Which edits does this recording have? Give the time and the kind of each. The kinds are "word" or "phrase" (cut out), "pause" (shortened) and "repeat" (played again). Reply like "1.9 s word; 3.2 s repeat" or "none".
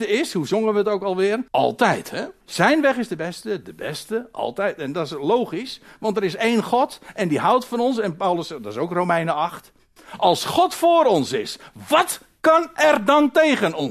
1.5 s pause; 2.4 s pause